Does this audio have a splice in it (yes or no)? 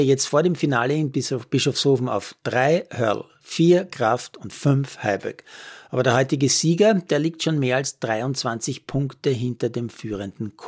no